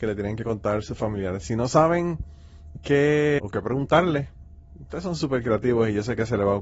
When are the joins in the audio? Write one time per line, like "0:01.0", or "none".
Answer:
0:03.4